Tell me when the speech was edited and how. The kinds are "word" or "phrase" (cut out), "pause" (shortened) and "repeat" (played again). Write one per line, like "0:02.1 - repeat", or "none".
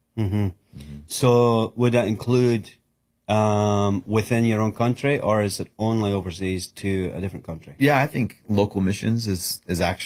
none